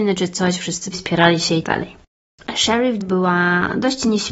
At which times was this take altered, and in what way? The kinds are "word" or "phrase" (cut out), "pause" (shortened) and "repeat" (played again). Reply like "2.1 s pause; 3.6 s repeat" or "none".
0.9 s word; 1.6 s word; 3.0 s word